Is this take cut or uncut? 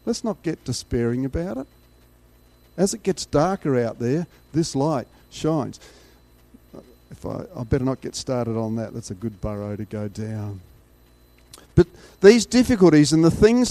uncut